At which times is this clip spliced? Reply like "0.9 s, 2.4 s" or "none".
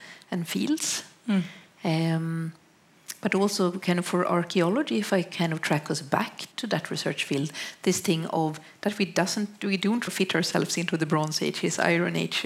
6.5 s, 10.1 s